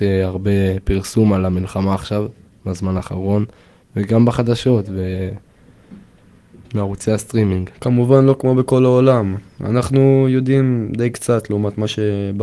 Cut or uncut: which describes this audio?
uncut